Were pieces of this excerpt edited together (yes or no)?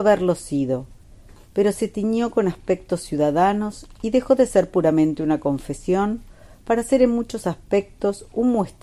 no